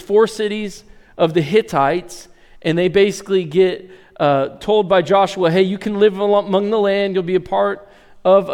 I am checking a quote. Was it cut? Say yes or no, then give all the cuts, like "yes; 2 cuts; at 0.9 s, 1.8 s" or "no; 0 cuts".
no; 0 cuts